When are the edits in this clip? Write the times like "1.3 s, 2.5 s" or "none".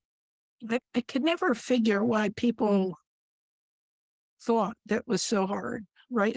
none